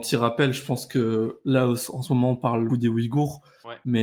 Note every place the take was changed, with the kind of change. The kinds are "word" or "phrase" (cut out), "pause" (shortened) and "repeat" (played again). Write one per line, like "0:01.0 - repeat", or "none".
0:02.7 - word